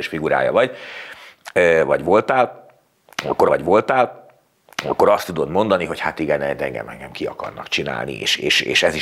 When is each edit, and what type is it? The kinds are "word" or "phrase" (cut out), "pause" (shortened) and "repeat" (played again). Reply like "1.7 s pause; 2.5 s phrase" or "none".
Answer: 3.5 s repeat